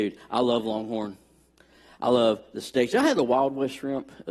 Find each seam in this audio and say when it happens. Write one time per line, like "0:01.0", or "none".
none